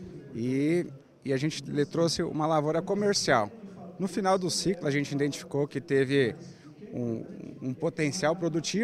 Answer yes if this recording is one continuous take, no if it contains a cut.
yes